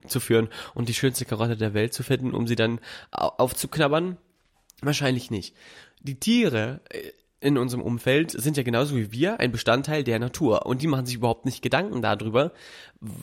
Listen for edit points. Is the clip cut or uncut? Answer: uncut